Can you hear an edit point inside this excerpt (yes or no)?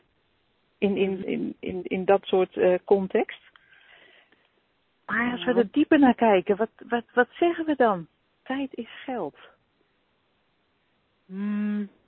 yes